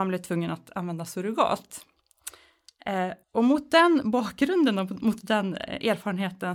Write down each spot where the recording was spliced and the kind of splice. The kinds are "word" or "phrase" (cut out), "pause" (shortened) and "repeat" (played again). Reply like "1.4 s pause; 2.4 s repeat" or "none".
3.2 s pause